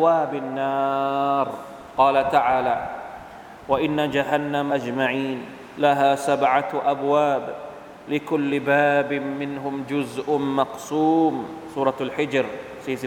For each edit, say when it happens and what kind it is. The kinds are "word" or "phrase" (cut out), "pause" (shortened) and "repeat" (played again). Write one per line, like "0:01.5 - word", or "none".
0:04.7 - word